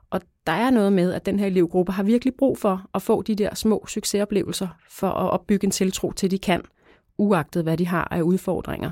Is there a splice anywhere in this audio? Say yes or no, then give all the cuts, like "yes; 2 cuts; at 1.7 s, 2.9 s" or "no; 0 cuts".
no; 0 cuts